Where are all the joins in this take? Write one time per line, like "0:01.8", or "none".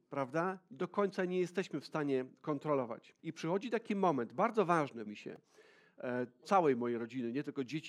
0:03.2
0:05.1
0:06.4